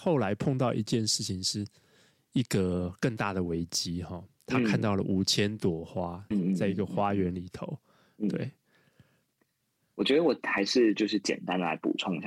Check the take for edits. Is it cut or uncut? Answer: cut